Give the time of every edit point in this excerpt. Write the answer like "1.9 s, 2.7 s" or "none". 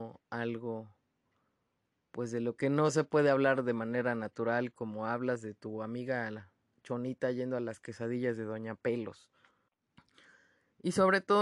none